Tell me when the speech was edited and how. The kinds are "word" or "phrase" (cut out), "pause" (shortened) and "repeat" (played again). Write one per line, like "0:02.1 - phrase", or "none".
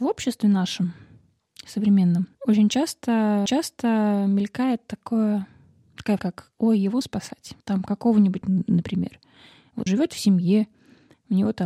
0:02.3 - pause
0:03.5 - repeat
0:06.2 - word
0:07.0 - word
0:07.6 - pause
0:08.4 - phrase
0:09.9 - word